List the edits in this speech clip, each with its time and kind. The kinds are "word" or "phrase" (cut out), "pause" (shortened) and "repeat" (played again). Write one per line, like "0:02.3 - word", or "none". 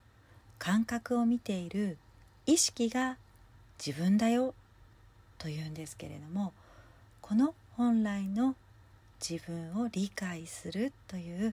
none